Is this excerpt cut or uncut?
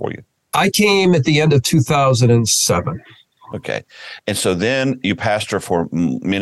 uncut